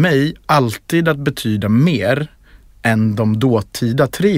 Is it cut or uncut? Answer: uncut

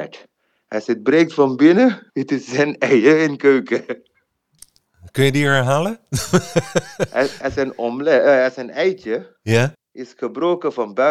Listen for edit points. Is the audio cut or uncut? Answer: cut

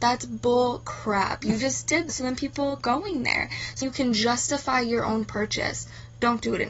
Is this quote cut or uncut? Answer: cut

